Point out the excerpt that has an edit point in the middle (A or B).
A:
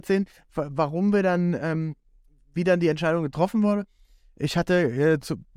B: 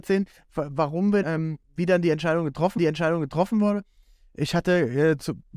B